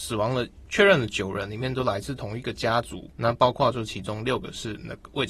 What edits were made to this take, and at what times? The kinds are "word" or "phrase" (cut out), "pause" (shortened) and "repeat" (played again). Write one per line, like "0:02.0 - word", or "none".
0:03.1 - pause